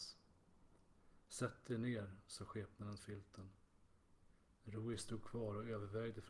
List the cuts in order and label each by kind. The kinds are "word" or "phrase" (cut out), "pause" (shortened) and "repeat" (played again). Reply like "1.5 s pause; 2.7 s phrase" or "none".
3.0 s phrase